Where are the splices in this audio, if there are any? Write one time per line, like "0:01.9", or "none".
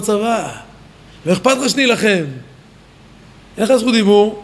none